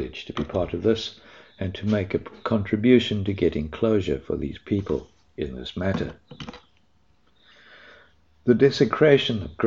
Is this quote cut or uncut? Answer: uncut